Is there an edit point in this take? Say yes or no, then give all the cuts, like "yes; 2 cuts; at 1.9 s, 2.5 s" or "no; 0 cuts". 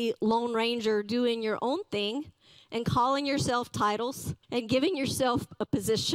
yes; 1 cut; at 4.4 s